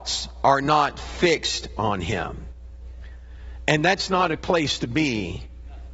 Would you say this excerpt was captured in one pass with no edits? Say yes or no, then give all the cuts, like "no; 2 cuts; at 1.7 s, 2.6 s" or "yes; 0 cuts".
no; 1 cut; at 4.4 s